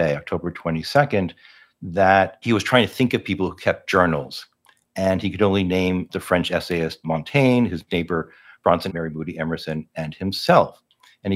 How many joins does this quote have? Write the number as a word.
one